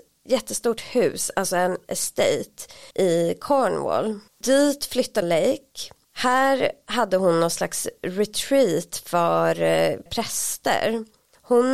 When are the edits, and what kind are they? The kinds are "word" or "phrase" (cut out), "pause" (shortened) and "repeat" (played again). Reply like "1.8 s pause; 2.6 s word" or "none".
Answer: 2.9 s pause; 4.3 s pause; 5.2 s phrase; 6.0 s pause; 10.1 s word